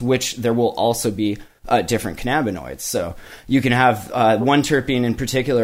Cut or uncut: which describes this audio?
uncut